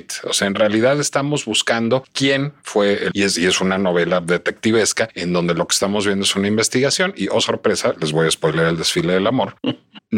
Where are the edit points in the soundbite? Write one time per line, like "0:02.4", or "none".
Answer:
0:03.1